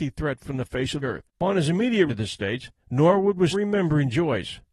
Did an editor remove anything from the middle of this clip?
yes; 5 cuts; at 1.0 s, 1.3 s, 2.1 s, 2.8 s, 3.5 s

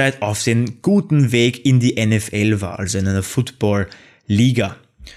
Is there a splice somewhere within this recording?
no; 0 cuts

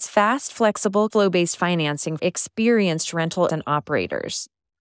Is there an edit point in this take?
yes; 3 cuts; at 1.1 s, 2.2 s, 3.5 s

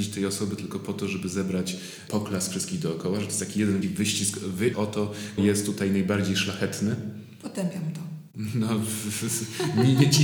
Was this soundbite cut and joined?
yes; 4 cuts; at 2.1 s, 3.8 s, 4.7 s, 5.4 s

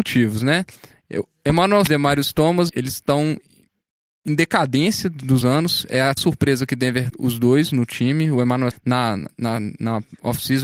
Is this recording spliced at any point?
yes; 6 cuts; at 1.9 s, 2.7 s, 5.4 s, 6.2 s, 7.1 s, 8.7 s

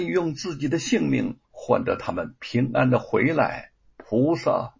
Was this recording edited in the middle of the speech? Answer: yes; 1 cut; at 1.4 s

